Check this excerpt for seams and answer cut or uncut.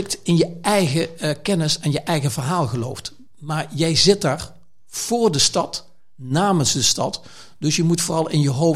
uncut